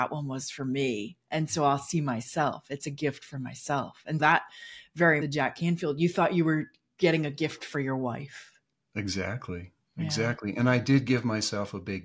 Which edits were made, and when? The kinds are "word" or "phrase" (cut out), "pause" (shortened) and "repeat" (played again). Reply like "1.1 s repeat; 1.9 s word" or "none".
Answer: 4.2 s word; 5.2 s phrase